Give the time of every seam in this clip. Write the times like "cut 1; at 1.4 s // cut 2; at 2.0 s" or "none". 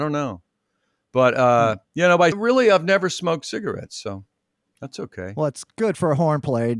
cut 1; at 1.9 s // cut 2; at 2.3 s

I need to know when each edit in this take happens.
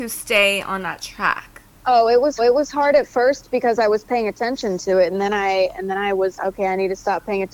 cut 1; at 2.4 s // cut 2; at 6.4 s

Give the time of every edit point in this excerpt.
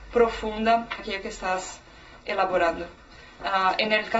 cut 1; at 1.0 s

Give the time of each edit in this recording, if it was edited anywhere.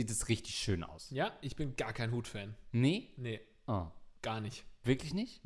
cut 1; at 4.2 s

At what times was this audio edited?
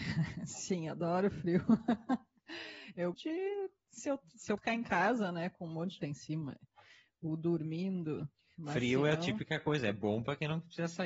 cut 1; at 3.1 s // cut 2; at 4.6 s // cut 3; at 6.0 s

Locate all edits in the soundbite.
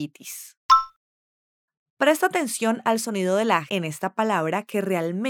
cut 1; at 1.2 s // cut 2; at 3.7 s

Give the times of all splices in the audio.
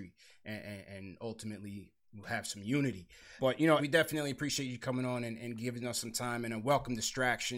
cut 1; at 3.4 s // cut 2; at 3.8 s

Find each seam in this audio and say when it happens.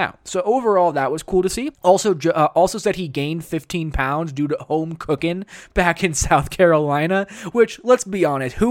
cut 1; at 1.7 s

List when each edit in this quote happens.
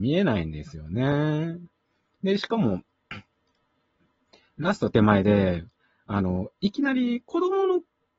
none

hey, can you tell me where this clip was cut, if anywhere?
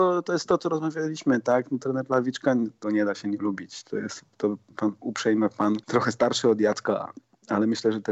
cut 1; at 2.8 s // cut 2; at 4.7 s // cut 3; at 5.8 s

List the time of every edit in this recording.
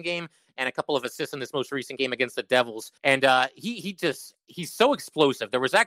cut 1; at 3.0 s

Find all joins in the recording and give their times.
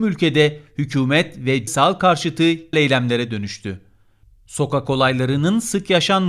cut 1; at 1.7 s // cut 2; at 2.7 s

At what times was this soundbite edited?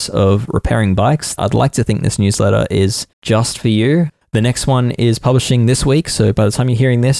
cut 1; at 1.4 s // cut 2; at 3.1 s

